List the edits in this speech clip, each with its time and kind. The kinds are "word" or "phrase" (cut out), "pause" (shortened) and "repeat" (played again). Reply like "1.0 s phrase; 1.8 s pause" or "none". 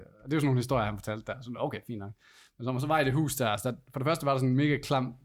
none